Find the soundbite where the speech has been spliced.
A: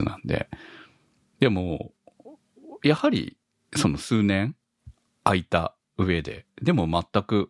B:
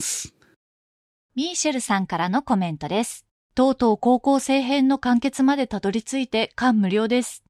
B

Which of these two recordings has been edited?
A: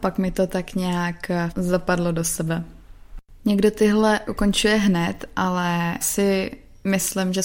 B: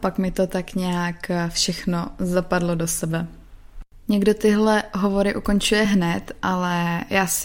A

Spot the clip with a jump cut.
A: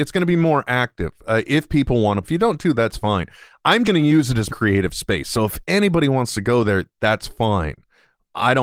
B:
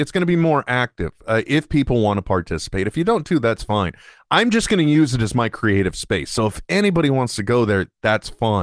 A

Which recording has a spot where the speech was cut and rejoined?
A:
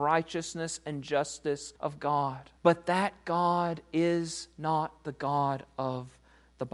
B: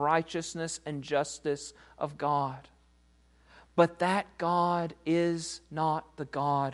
A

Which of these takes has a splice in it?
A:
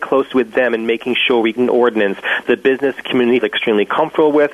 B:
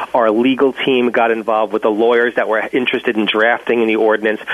A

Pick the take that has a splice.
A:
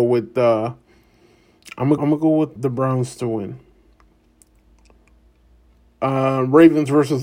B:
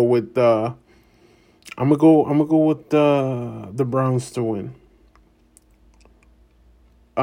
A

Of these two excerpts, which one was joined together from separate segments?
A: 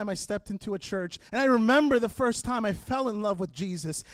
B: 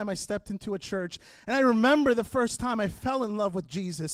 A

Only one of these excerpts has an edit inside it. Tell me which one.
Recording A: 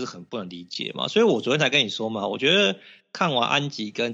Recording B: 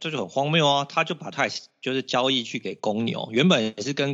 B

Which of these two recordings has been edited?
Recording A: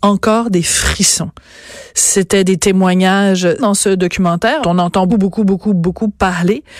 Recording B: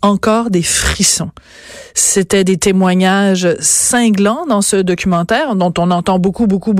A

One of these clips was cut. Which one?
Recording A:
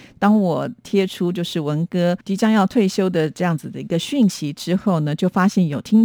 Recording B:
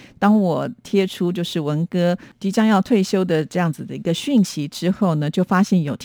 A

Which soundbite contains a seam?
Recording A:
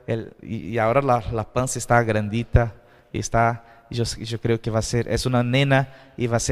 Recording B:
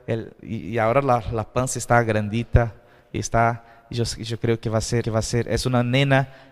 B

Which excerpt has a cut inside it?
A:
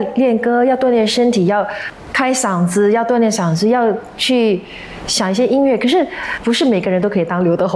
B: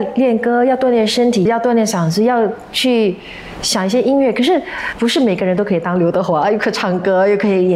B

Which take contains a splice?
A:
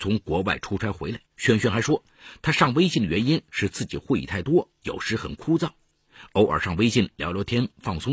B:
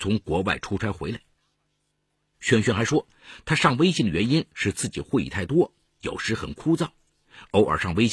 A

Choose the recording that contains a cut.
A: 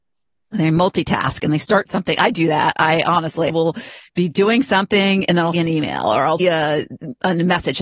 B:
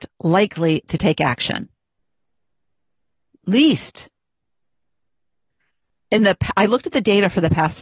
A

